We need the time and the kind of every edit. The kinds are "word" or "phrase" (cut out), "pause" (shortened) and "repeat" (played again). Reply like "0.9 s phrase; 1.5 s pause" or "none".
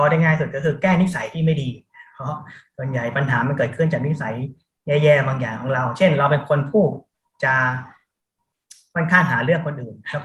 none